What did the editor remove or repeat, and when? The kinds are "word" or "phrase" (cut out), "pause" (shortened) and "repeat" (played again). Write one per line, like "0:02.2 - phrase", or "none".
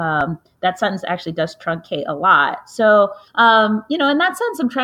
0:03.3 - pause